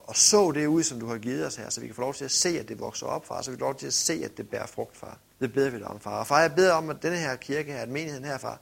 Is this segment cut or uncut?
cut